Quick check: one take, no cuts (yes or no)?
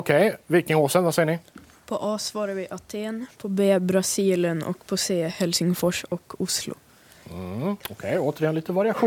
no